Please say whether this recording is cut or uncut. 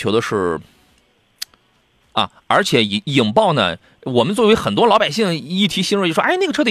uncut